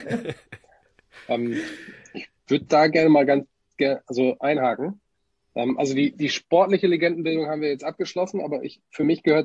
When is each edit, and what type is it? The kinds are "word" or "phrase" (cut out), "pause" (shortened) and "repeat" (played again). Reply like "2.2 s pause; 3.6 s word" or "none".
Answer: none